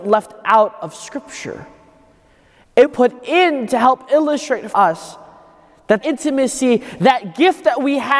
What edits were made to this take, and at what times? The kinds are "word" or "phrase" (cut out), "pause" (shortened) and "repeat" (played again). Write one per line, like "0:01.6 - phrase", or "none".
0:02.9 - word
0:04.7 - word
0:06.0 - word

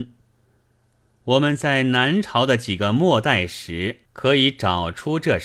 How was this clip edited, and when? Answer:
0:04.1 - pause

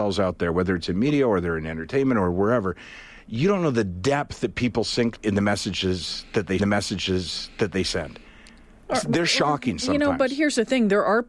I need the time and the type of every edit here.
0:05.2 - word
0:06.6 - repeat

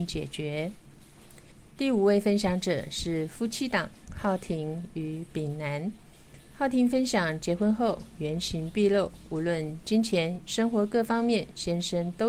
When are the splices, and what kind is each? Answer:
0:01.5 - pause
0:10.5 - phrase

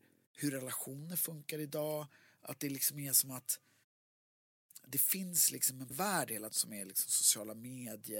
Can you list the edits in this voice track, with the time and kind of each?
0:05.9 - word
0:06.5 - word

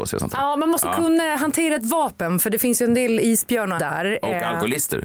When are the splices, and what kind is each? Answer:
0:03.8 - word

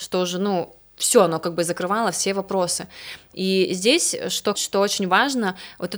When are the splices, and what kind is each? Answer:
0:04.5 - phrase

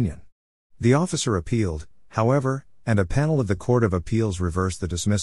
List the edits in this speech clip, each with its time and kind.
none

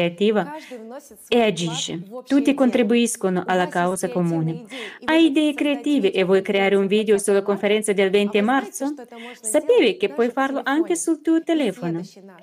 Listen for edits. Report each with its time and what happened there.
none

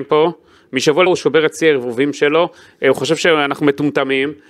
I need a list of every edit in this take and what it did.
0:01.1 - word

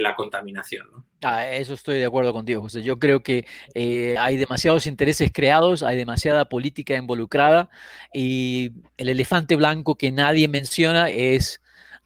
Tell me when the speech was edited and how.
0:01.1 - pause
0:08.9 - pause

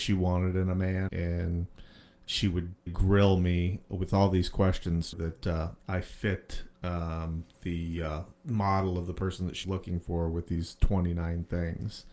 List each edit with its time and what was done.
0:01.1 - word
0:02.9 - word
0:05.1 - phrase
0:05.8 - word
0:08.3 - pause
0:09.6 - word

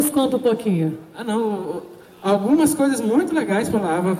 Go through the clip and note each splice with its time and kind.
none

